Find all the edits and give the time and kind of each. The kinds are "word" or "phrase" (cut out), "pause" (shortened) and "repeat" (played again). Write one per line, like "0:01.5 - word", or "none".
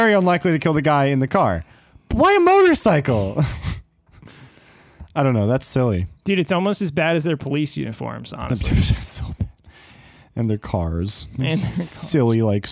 none